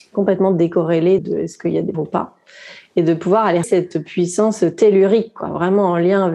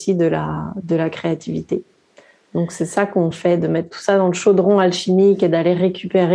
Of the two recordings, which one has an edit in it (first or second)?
first